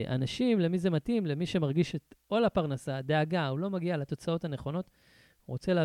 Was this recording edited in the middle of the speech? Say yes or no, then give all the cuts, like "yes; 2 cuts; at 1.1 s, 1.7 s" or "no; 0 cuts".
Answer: yes; 1 cut; at 1.9 s